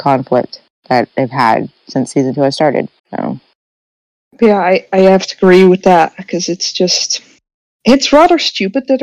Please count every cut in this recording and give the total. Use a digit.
1